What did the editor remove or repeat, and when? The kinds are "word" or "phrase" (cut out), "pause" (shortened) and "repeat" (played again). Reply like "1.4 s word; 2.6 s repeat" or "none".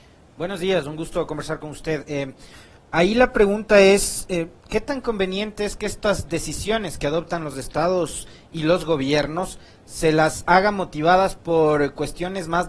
none